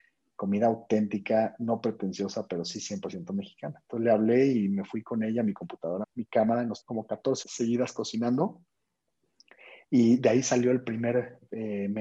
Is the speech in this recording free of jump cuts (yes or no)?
no